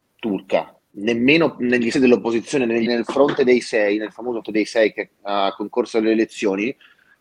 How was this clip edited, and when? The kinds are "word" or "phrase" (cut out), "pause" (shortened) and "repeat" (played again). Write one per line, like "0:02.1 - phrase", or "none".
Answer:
0:01.9 - word
0:02.9 - word
0:04.4 - word